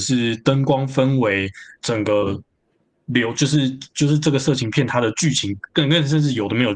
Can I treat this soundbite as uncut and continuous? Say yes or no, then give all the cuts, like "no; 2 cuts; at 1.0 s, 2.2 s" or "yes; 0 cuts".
yes; 0 cuts